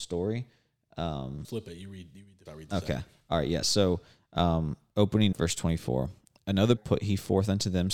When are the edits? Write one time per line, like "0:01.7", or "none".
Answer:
0:01.4
0:02.5
0:05.3
0:06.8